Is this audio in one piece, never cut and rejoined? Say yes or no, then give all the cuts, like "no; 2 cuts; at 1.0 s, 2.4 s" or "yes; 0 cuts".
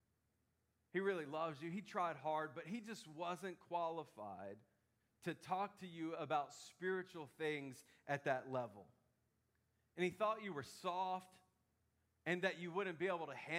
yes; 0 cuts